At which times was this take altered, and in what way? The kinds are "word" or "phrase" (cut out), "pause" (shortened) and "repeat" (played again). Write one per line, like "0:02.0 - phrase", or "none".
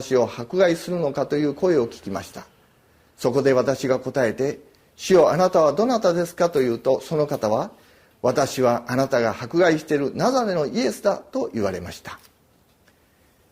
none